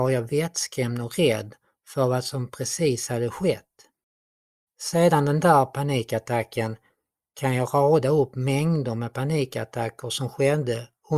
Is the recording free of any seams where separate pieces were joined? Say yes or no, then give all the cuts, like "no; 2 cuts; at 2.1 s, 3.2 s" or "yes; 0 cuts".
yes; 0 cuts